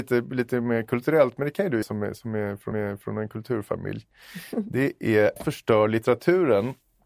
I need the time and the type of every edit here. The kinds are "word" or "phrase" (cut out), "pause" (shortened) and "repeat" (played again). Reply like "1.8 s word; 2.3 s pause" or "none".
1.8 s word; 2.7 s repeat; 5.4 s word